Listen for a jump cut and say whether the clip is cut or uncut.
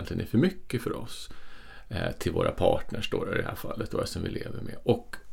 uncut